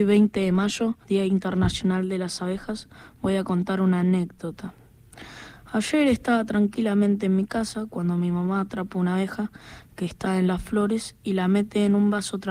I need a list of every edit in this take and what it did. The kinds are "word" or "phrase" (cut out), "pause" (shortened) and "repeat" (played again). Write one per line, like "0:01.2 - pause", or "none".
0:01.0 - pause

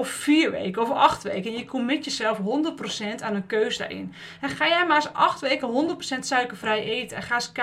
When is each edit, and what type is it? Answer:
none

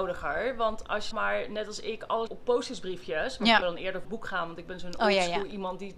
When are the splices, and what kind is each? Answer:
0:01.1 - word
0:02.3 - word
0:03.6 - word
0:04.0 - word

